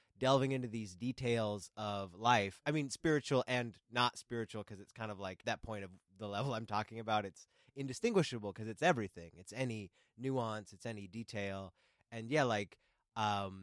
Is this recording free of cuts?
no; 1 cut; at 5.4 s

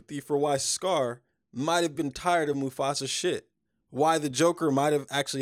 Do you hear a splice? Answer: no; 0 cuts

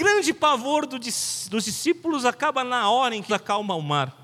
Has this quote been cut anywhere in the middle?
yes; 1 cut; at 3.3 s

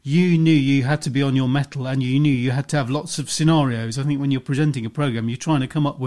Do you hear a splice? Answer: no; 0 cuts

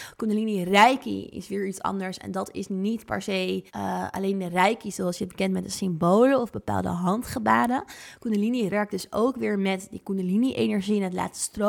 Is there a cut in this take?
yes; 2 cuts; at 3.7 s, 8.7 s

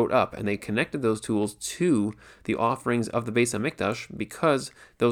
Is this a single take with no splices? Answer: yes; 0 cuts

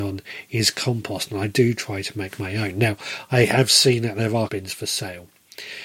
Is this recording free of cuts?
no; 1 cut; at 4.5 s

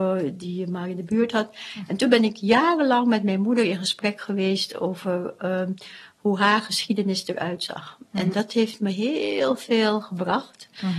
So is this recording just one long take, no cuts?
no; 1 cut; at 8.3 s

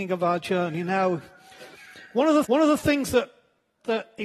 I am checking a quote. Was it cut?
yes; 1 cut; at 2.4 s

